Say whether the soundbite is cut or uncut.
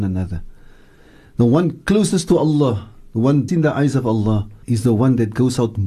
cut